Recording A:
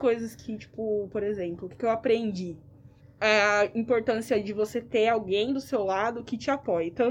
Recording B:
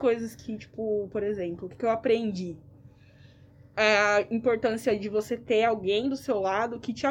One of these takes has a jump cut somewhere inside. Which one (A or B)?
A